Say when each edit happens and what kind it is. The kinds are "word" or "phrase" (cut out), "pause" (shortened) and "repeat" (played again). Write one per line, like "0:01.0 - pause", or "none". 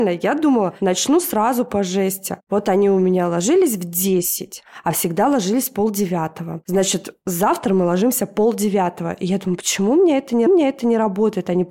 0:10.5 - repeat